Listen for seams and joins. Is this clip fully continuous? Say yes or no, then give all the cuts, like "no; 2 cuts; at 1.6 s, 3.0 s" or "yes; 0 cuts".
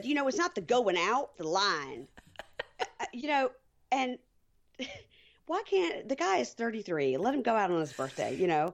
no; 1 cut; at 1.4 s